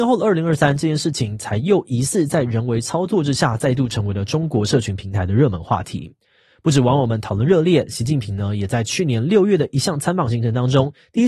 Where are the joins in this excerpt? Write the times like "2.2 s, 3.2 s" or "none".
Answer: none